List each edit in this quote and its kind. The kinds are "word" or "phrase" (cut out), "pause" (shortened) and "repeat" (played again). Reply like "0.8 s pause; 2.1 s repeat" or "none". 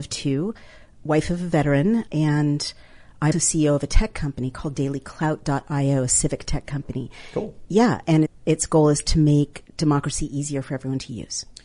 2.1 s word; 3.3 s word; 8.3 s word